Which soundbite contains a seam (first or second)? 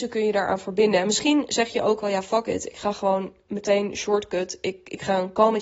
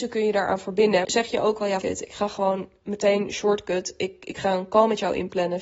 second